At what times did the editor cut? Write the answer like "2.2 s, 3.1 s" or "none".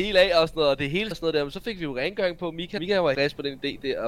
1.1 s, 2.8 s, 3.1 s